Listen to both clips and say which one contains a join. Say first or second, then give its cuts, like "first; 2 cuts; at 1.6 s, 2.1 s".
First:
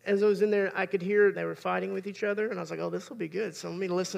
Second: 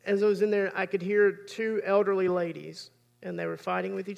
first; 1 cut; at 1.3 s